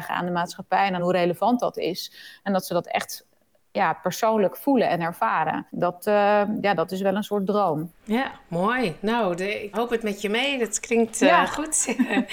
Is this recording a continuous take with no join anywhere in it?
no; 3 cuts; at 1.0 s, 5.7 s, 9.7 s

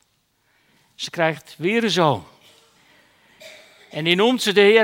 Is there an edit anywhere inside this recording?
no; 0 cuts

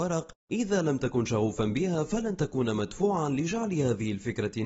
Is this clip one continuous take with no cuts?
yes; 0 cuts

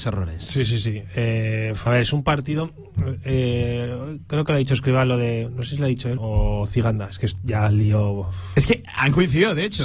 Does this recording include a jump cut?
yes; 2 cuts; at 1.9 s, 6.2 s

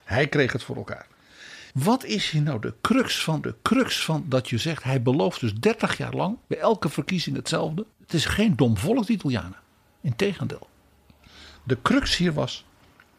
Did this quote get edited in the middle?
yes; 4 cuts; at 1.7 s, 3.4 s, 6.4 s, 7.9 s

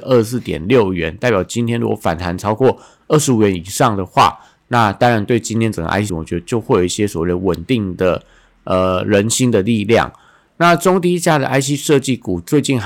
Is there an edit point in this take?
yes; 1 cut; at 6.1 s

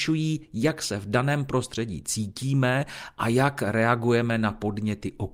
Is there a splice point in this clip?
no; 0 cuts

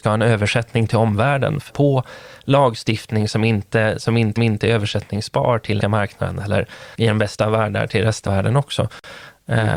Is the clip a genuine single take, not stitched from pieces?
no; 5 cuts; at 1.7 s, 4.4 s, 5.8 s, 6.9 s, 8.3 s

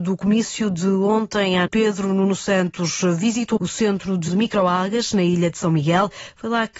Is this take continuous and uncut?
no; 3 cuts; at 1.7 s, 3.6 s, 4.3 s

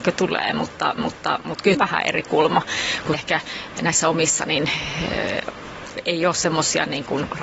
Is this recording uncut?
no; 3 cuts; at 1.0 s, 1.7 s, 3.1 s

